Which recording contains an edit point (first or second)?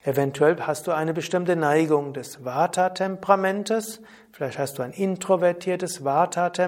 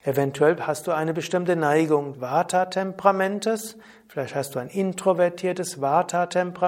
second